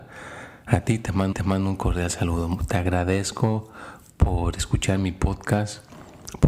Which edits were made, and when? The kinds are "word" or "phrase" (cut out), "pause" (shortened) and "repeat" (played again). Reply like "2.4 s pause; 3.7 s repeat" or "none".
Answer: 1.3 s repeat

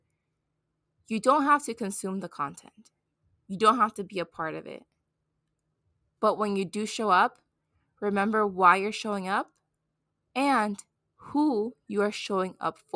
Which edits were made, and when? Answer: none

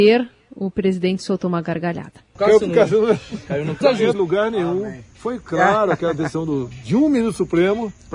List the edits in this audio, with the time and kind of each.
4.1 s phrase

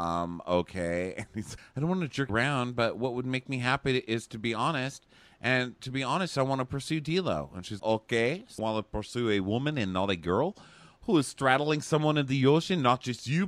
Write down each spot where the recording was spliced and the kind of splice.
1.6 s word; 2.3 s word; 7.8 s word; 8.6 s word

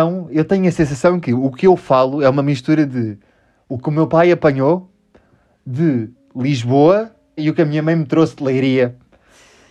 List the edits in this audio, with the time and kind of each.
7.4 s phrase

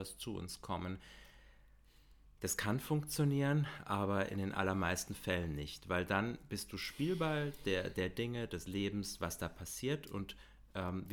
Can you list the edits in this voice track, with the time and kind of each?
none

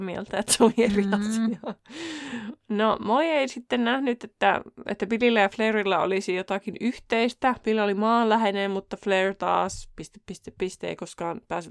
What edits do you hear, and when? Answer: 2.6 s pause

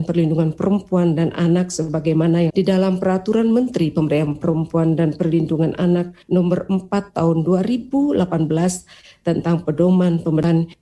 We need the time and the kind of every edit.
2.5 s phrase; 6.2 s pause

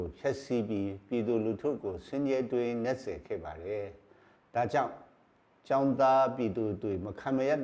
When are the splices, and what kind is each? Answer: none

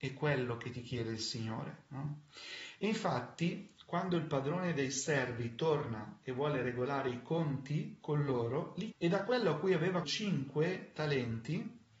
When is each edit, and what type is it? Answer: 8.9 s word; 10.0 s word

